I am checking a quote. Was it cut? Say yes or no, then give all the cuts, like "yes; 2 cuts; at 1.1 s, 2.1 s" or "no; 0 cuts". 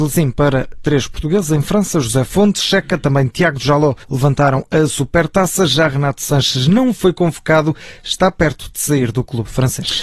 yes; 1 cut; at 4.0 s